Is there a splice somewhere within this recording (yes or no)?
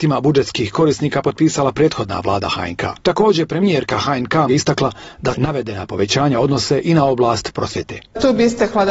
yes